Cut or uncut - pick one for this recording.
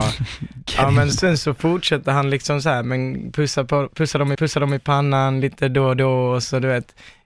cut